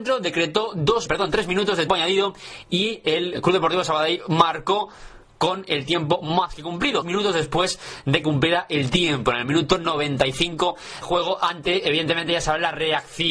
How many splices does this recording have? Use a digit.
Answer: 6